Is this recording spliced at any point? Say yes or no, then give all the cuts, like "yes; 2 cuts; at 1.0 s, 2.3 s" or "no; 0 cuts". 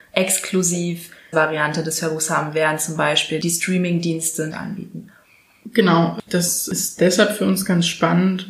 yes; 2 cuts; at 1.3 s, 4.5 s